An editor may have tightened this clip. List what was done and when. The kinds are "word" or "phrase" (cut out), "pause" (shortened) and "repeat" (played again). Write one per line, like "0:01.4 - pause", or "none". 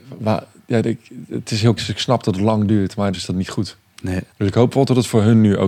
0:01.8 - word
0:03.1 - phrase
0:04.3 - pause